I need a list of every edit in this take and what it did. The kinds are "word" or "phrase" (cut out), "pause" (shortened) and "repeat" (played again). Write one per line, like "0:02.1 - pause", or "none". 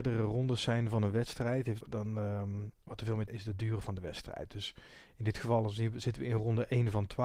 0:01.8 - word
0:02.8 - pause
0:03.3 - phrase